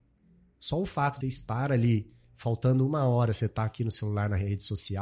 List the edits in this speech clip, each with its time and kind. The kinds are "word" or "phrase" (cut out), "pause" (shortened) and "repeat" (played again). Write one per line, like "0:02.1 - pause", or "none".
0:01.2 - word